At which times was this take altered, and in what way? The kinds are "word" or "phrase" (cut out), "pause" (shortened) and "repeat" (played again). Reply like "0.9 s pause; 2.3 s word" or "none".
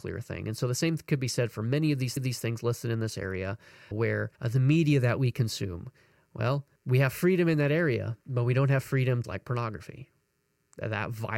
2.2 s repeat; 3.9 s word; 4.3 s pause; 6.8 s pause; 8.2 s pause; 9.2 s phrase